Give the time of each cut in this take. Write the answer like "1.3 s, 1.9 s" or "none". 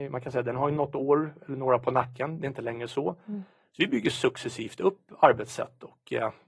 none

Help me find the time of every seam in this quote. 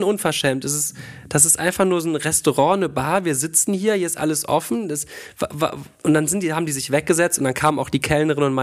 none

